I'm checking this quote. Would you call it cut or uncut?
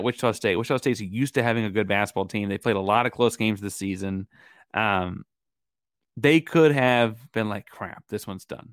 uncut